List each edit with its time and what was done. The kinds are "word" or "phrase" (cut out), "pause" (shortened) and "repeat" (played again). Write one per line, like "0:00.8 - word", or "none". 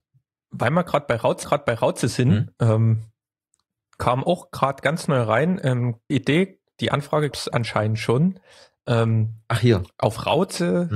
0:01.4 - repeat
0:06.1 - word
0:07.3 - word